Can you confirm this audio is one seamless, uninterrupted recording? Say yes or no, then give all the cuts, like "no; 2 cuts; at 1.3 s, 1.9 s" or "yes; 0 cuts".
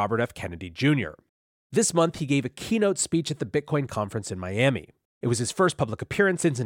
yes; 0 cuts